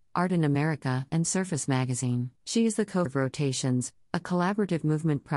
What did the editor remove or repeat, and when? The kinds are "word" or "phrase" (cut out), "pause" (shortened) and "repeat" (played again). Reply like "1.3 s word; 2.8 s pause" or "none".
2.4 s pause; 3.1 s word